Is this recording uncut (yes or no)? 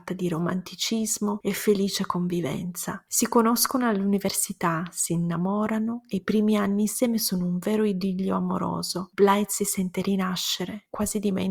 yes